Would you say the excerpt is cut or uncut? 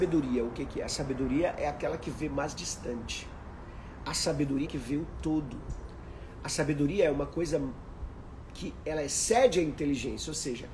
cut